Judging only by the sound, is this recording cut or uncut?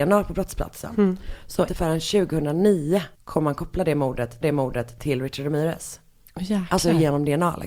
cut